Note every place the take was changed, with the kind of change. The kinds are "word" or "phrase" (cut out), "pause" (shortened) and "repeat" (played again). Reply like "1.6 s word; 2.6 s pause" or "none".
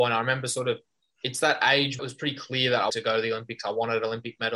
2.0 s phrase; 2.9 s word

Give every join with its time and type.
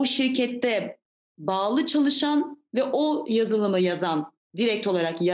none

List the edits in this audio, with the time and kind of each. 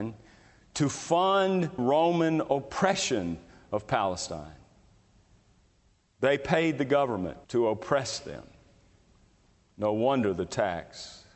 1.8 s word; 7.4 s pause

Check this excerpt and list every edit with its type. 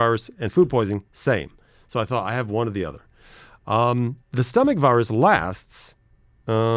none

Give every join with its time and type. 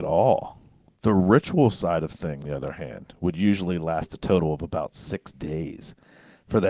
2.4 s word

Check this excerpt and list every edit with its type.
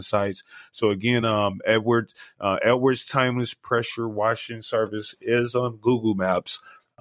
none

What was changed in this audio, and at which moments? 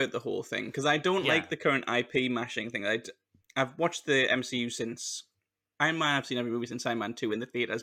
none

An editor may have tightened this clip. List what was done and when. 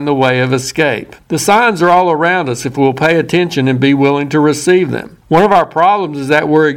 1.2 s pause; 5.2 s pause

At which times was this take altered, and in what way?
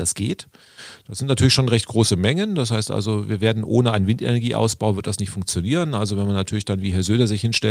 none

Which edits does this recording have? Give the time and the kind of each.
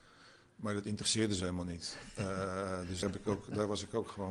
3.0 s word

